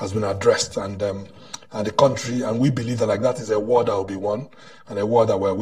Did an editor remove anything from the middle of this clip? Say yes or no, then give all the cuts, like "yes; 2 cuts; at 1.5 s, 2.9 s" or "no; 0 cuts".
no; 0 cuts